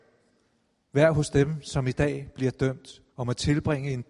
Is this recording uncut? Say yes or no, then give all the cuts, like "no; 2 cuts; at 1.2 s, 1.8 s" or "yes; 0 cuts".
no; 1 cut; at 3.1 s